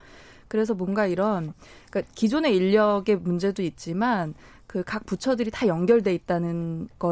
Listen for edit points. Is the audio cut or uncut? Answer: uncut